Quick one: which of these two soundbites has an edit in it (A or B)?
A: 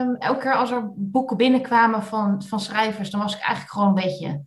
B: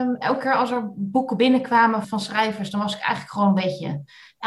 B